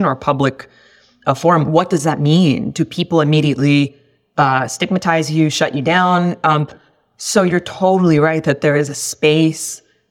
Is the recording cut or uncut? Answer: uncut